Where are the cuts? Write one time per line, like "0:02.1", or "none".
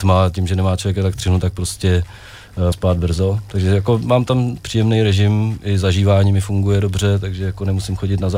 0:02.7